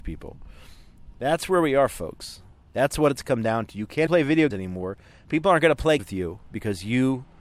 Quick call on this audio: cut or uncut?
cut